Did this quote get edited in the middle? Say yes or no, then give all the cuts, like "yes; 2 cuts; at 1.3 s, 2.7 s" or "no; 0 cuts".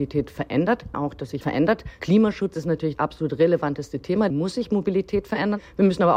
yes; 4 cuts; at 0.9 s, 1.4 s, 2.9 s, 4.3 s